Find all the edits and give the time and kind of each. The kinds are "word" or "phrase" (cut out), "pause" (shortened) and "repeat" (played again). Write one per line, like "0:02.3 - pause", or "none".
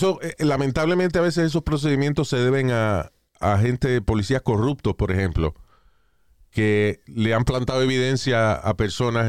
none